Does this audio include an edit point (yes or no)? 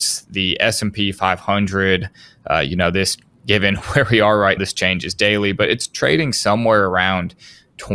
yes